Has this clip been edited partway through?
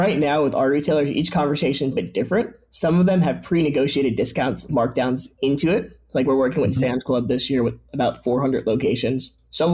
yes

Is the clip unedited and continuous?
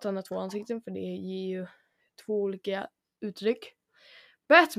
yes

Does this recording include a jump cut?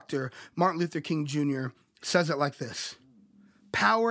no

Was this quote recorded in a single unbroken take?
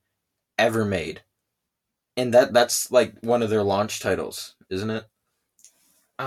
no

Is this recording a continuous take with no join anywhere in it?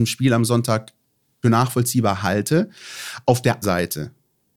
no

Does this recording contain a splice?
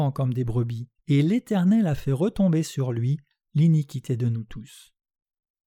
yes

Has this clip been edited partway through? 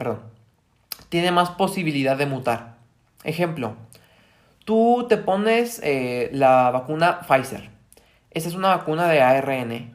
no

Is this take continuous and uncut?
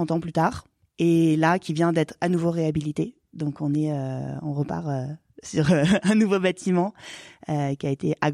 yes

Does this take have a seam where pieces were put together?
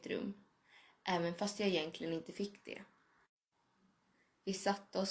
no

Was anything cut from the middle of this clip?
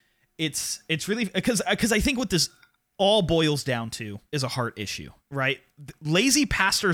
yes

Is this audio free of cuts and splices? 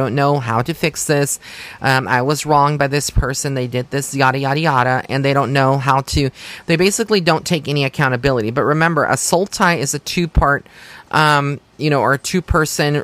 yes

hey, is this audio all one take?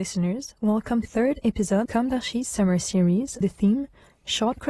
no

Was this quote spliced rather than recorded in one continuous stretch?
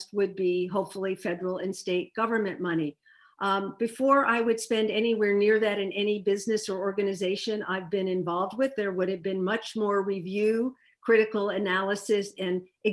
no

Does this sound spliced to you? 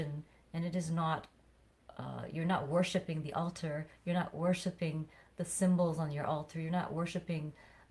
no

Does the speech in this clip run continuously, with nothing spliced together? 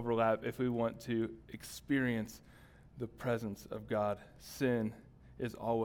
no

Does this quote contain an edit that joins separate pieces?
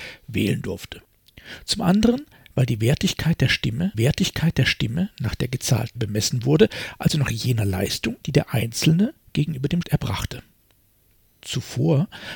yes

